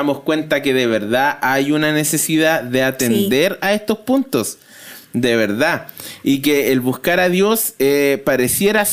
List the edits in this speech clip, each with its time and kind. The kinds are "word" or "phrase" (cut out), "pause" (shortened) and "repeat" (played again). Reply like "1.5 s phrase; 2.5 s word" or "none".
none